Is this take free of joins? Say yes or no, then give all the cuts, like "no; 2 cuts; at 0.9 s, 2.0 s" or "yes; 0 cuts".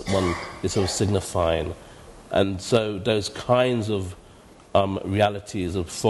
yes; 0 cuts